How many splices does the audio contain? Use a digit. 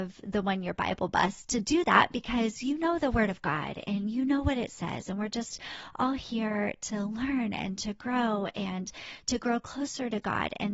1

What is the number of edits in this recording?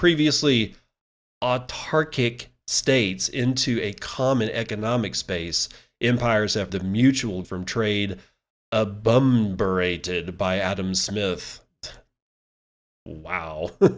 2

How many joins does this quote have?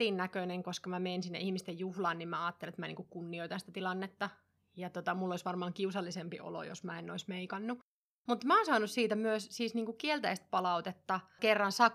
0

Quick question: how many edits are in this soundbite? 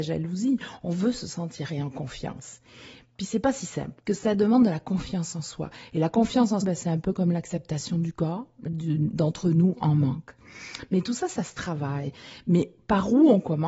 4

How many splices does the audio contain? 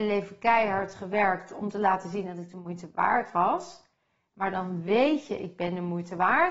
0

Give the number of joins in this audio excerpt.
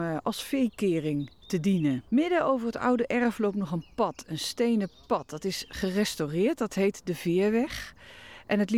1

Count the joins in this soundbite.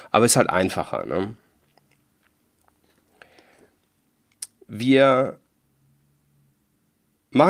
0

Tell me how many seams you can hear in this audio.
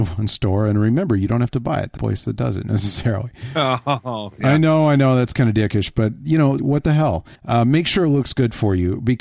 3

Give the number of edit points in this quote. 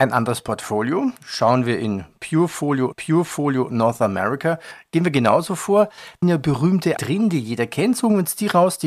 4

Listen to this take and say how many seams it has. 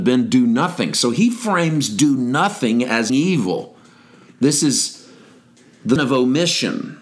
2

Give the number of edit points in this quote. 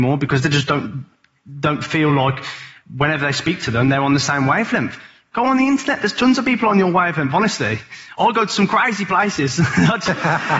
0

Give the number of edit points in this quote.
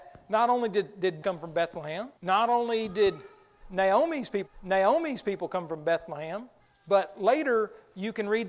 4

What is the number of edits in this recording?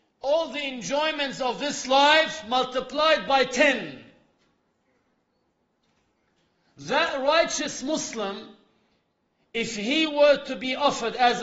0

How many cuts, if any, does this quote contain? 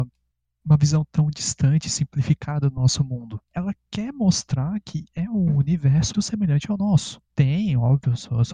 3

